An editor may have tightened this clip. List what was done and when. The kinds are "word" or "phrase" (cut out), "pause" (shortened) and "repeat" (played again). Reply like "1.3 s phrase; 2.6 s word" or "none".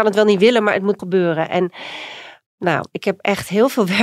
1.0 s word

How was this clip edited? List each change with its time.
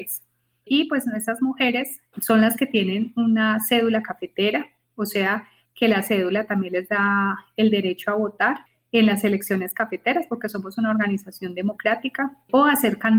none

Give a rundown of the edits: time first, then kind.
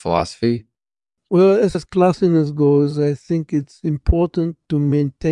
1.7 s word

